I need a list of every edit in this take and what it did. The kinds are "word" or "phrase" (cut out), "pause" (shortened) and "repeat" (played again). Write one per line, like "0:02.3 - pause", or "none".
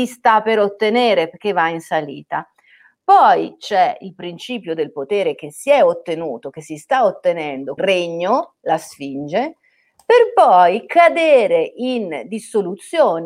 0:07.8 - word